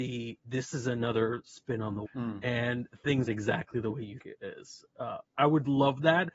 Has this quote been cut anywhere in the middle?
yes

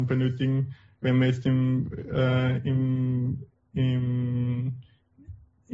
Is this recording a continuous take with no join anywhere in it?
yes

